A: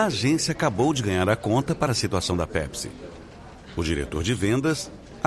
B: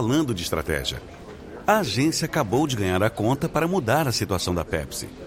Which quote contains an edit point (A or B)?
A